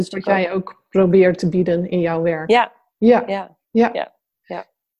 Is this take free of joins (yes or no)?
yes